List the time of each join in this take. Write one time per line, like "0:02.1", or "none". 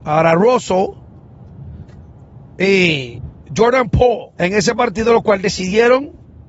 0:04.3